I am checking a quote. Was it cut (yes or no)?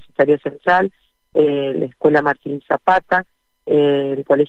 no